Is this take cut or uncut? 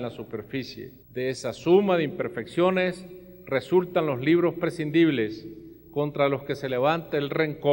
cut